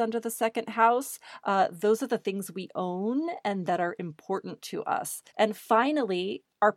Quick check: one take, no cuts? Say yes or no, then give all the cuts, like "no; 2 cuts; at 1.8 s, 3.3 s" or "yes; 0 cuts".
no; 1 cut; at 5.3 s